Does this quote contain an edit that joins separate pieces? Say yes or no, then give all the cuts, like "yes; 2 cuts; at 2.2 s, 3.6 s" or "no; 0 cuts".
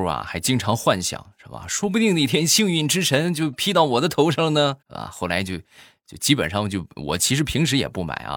yes; 1 cut; at 4.8 s